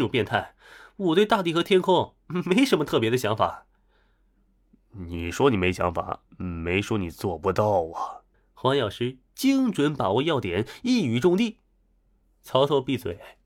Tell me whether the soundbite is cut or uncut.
cut